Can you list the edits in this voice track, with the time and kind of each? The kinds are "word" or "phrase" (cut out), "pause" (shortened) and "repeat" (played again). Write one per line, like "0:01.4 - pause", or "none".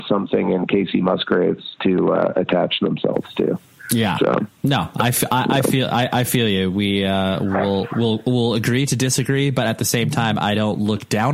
none